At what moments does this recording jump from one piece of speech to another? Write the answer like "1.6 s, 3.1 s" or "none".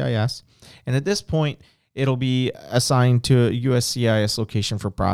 none